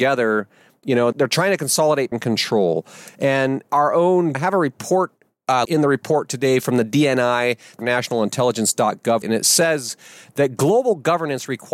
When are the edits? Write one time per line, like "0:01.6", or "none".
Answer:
0:01.1
0:02.1
0:03.6
0:04.3
0:05.6
0:07.8
0:09.2

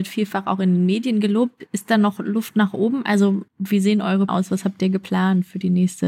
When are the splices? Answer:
0:03.5
0:04.3

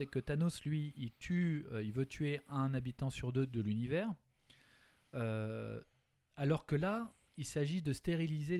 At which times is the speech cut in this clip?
none

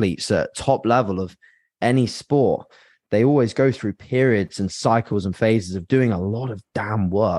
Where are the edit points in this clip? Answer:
none

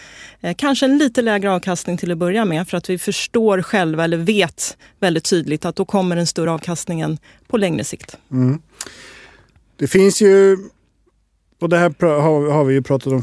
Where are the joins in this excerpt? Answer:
none

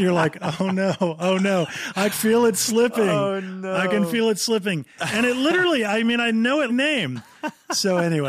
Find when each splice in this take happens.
0:02.1
0:06.7

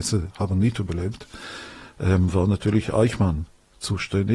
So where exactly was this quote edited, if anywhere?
none

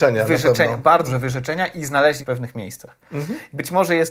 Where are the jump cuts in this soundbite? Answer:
0:01.1
0:02.2

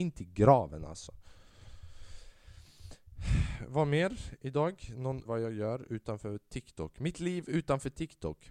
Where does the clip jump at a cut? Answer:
0:05.2

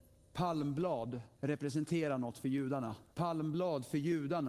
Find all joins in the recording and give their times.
0:01.3
0:03.1

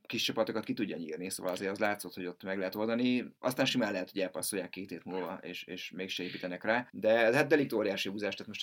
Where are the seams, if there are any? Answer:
0:03.4
0:06.9

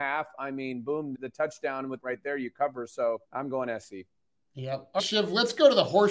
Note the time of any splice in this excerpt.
0:01.1
0:02.0
0:03.2
0:04.2
0:05.0

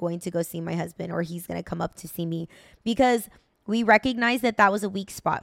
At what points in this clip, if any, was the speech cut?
none

